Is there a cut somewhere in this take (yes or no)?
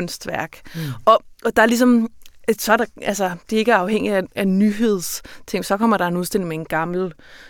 no